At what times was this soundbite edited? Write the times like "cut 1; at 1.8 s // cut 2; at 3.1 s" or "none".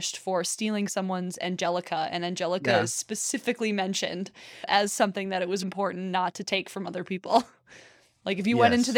cut 1; at 5.6 s